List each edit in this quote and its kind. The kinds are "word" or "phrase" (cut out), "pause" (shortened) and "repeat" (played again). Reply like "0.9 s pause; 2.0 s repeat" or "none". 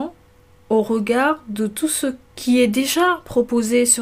2.2 s pause